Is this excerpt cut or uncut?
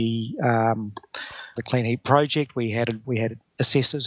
cut